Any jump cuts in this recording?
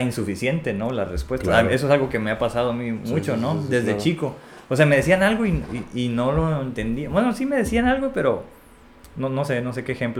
no; 0 cuts

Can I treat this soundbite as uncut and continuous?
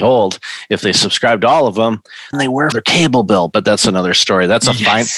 no; 2 cuts; at 2.3 s, 2.7 s

